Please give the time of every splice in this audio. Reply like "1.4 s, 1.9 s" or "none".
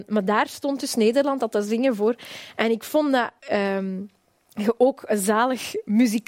3.4 s